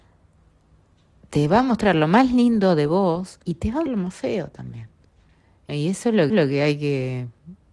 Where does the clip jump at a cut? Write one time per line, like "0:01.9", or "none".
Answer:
0:03.4
0:03.9
0:05.7
0:06.3